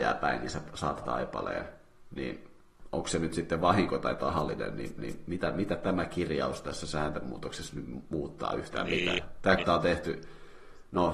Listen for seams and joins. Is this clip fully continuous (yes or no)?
no